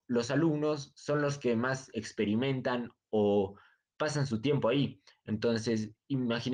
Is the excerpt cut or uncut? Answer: uncut